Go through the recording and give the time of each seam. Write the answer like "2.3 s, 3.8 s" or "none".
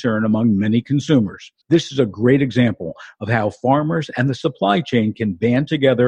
1.6 s